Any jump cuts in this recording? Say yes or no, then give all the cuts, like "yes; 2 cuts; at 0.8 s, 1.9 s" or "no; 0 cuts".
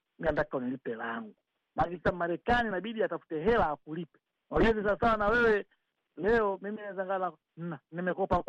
no; 0 cuts